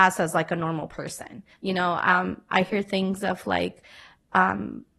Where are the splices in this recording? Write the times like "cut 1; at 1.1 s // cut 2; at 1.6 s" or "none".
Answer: cut 1; at 1.5 s